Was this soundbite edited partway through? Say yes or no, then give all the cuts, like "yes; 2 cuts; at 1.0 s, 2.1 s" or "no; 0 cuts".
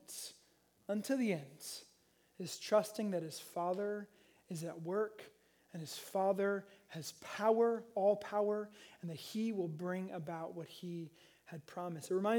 no; 0 cuts